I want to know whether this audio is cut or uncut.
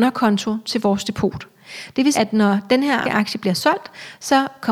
cut